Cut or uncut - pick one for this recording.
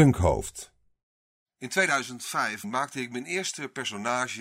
uncut